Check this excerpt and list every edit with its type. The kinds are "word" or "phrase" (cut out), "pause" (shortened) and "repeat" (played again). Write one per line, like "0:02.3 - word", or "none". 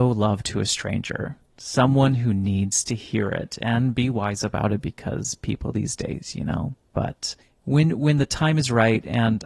0:01.5 - pause
0:07.4 - pause